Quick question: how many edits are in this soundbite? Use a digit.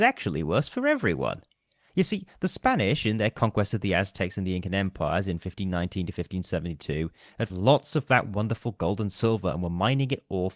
1